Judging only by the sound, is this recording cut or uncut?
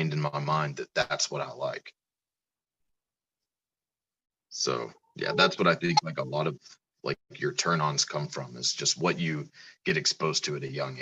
uncut